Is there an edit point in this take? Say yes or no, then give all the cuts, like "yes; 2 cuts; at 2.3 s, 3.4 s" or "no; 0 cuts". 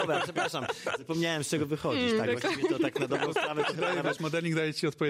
no; 0 cuts